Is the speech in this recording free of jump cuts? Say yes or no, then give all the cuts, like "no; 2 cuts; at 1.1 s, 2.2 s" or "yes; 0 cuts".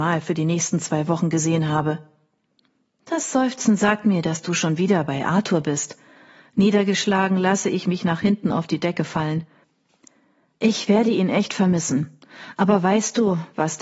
yes; 0 cuts